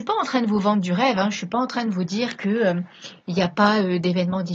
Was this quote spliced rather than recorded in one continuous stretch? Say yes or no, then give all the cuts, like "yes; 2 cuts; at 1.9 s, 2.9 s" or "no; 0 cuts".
no; 0 cuts